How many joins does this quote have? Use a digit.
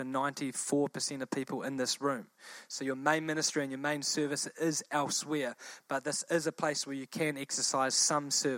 0